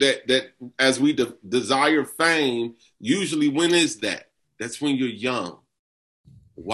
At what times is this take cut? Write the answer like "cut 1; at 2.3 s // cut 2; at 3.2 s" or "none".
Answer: none

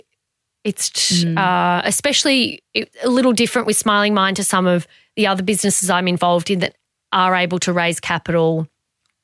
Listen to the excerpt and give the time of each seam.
cut 1; at 0.9 s

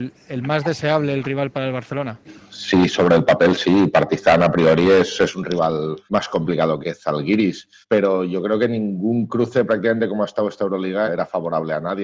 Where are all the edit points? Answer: cut 1; at 6.1 s // cut 2; at 6.8 s // cut 3; at 7.8 s // cut 4; at 11.1 s

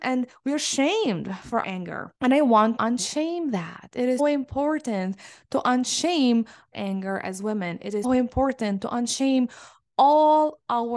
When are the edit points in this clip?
cut 1; at 1.6 s // cut 2; at 2.2 s // cut 3; at 2.8 s // cut 4; at 4.2 s // cut 5; at 6.7 s // cut 6; at 8.0 s

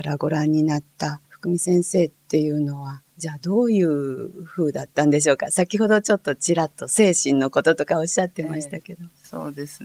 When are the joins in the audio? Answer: cut 1; at 1.3 s // cut 2; at 3.1 s

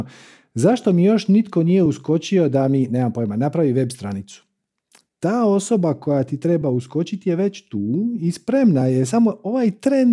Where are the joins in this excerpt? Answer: none

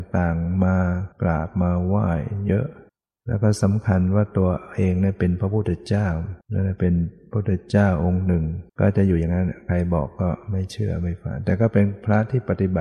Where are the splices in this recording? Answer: cut 1; at 1.1 s // cut 2; at 2.9 s // cut 3; at 6.4 s // cut 4; at 8.7 s

